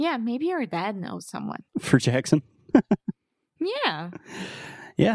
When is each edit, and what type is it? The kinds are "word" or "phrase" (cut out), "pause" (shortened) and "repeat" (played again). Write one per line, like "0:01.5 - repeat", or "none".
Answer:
0:01.7 - pause